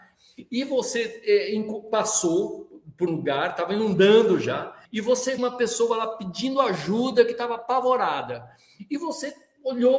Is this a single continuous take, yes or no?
no